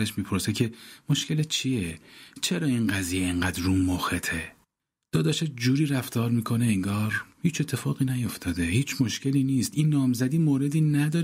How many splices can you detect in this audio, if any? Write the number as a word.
two